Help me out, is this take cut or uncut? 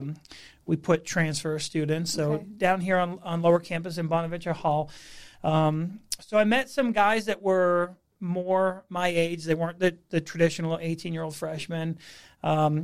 uncut